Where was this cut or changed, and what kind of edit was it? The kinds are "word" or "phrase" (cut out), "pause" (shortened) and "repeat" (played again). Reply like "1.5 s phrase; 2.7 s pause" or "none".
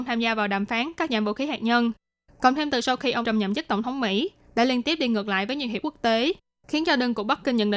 3.2 s word; 5.8 s word

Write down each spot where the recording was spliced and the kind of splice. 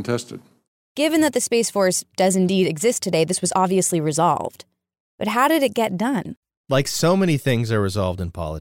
none

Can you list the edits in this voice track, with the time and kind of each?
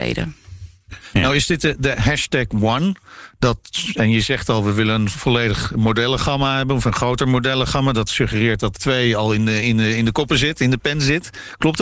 8.8 s word

